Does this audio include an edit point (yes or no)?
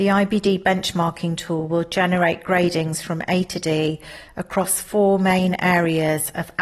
no